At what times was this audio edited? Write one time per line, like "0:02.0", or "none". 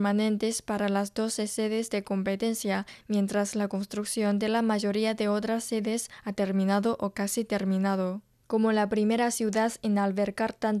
none